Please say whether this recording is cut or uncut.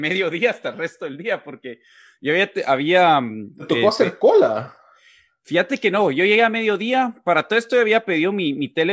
uncut